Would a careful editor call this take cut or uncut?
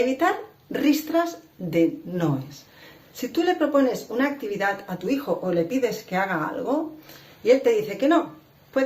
uncut